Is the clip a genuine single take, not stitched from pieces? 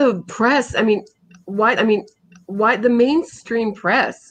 no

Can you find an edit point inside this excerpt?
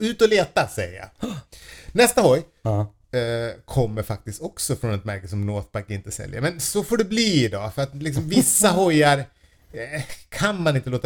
no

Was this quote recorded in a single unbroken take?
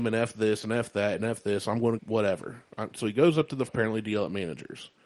no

